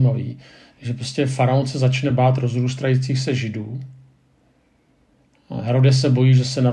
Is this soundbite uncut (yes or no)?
yes